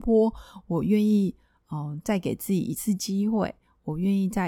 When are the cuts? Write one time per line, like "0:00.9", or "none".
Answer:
none